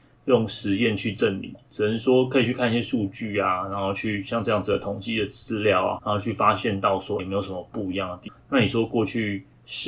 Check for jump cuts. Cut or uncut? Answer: cut